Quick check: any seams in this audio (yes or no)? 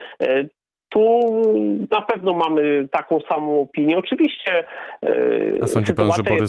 no